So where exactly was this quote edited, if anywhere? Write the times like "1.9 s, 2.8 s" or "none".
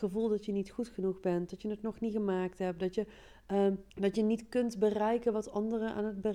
3.9 s